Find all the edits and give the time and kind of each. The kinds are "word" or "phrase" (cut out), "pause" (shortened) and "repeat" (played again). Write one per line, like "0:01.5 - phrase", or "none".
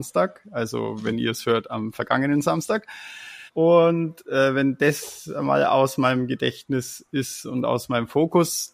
0:03.5 - pause